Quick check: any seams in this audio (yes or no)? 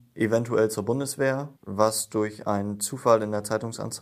yes